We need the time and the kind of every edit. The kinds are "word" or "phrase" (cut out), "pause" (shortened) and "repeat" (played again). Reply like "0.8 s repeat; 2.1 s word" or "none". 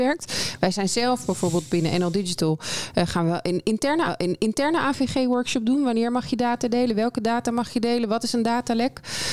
4.1 s repeat